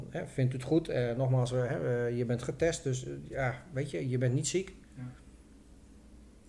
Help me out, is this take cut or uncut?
cut